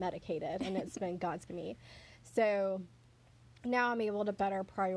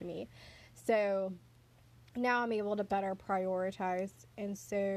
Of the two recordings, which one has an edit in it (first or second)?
first